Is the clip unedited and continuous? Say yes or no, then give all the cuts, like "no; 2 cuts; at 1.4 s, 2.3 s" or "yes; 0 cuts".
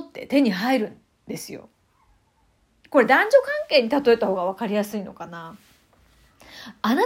yes; 0 cuts